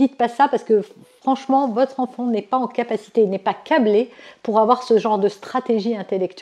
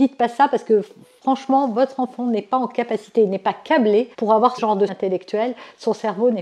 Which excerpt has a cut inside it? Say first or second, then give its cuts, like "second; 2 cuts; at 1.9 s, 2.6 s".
second; 3 cuts; at 4.1 s, 4.6 s, 4.9 s